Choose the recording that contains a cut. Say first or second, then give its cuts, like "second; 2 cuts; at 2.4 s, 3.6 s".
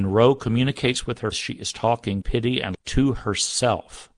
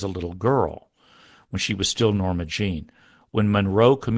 first; 3 cuts; at 1.3 s, 2.2 s, 2.7 s